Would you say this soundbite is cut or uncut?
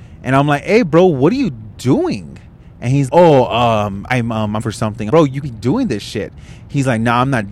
cut